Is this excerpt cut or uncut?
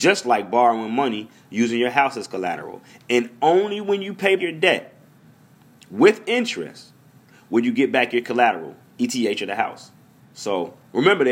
cut